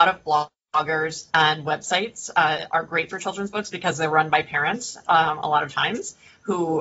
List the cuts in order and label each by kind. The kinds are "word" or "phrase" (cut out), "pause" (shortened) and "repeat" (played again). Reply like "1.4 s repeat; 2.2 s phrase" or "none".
1.3 s pause; 3.1 s word